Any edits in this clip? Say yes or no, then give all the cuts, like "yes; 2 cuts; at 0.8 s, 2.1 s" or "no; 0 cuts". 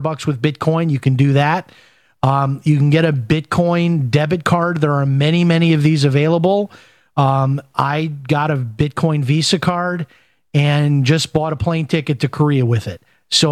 no; 0 cuts